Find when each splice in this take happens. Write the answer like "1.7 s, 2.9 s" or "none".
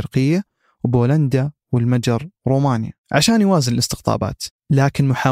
3.0 s